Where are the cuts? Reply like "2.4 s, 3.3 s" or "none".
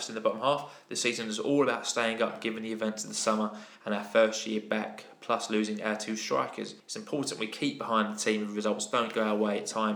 6.8 s